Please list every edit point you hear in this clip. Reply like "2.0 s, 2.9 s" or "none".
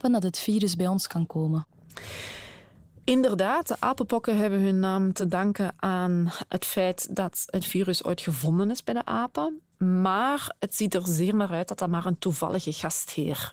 none